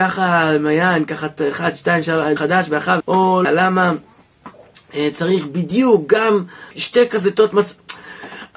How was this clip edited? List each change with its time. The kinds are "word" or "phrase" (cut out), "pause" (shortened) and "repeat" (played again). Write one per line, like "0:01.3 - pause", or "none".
0:02.4 - word
0:03.0 - phrase
0:03.4 - word
0:06.7 - pause